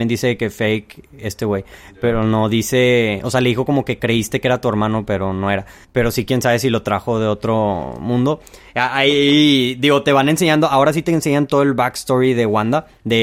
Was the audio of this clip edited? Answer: no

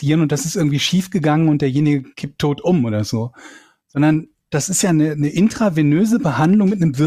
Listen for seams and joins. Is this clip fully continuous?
yes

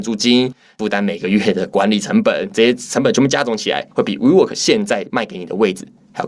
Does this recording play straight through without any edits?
no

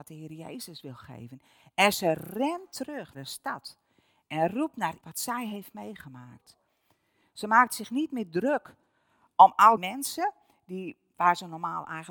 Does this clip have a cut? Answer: yes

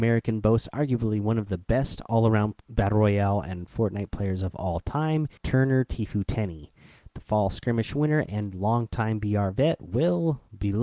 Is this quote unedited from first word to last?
no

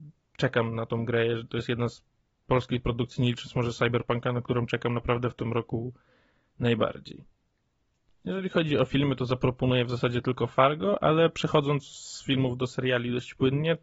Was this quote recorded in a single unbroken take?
yes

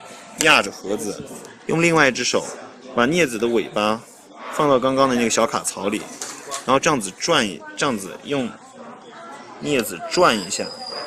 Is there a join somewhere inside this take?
yes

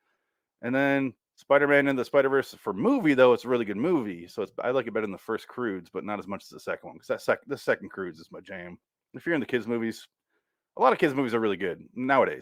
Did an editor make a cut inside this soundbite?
no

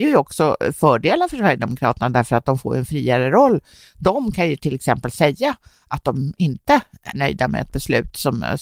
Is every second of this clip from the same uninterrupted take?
no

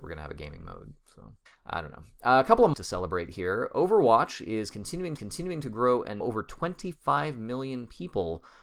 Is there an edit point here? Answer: yes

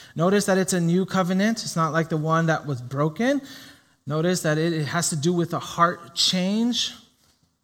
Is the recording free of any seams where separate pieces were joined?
yes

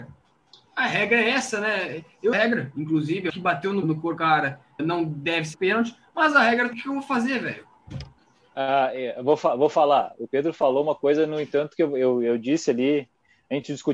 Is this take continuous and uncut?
no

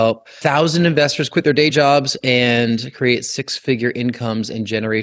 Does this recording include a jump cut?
no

